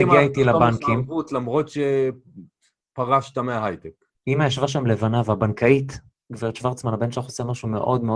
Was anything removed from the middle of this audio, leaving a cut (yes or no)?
yes